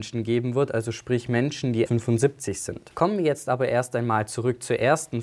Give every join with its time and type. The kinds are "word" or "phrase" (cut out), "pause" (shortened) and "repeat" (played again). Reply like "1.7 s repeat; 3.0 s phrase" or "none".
1.9 s phrase